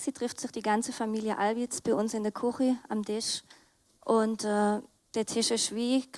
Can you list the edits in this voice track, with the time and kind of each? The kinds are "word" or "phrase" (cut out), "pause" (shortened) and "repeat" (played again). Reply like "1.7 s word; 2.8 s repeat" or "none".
none

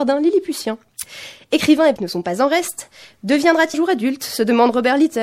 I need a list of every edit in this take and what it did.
2.0 s word; 3.7 s word

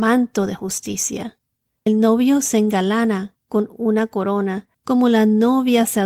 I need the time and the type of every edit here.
1.9 s word; 3.4 s pause; 4.7 s pause

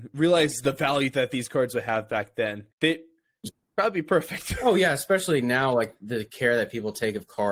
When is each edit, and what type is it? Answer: 2.7 s pause

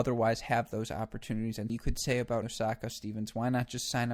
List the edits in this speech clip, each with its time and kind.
1.7 s word; 2.4 s word; 2.9 s word

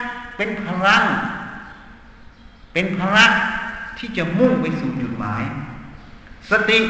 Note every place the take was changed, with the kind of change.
none

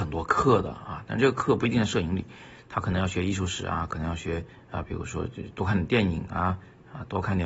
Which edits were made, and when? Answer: 4.5 s pause

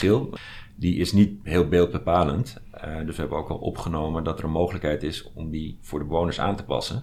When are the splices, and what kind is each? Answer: none

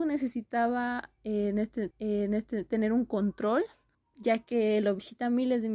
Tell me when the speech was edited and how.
1.9 s repeat; 3.9 s pause

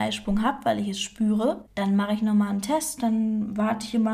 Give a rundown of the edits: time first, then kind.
1.7 s pause

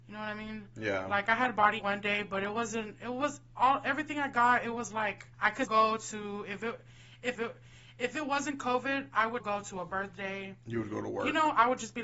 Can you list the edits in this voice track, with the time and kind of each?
1.8 s phrase; 5.3 s pause; 5.6 s word; 7.3 s repeat; 9.4 s word

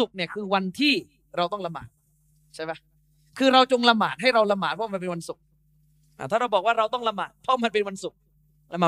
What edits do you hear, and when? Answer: none

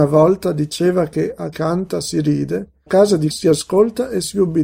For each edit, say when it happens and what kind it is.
1.5 s phrase; 2.9 s word; 3.3 s word

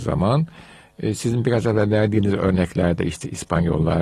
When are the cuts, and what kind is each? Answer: none

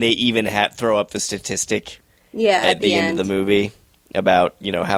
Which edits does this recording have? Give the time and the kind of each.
none

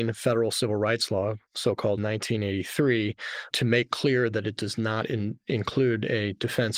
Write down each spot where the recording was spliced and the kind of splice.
1.5 s pause; 2.0 s word; 3.5 s word

